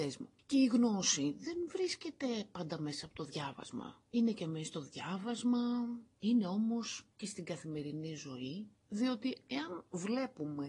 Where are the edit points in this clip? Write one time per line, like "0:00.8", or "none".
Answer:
none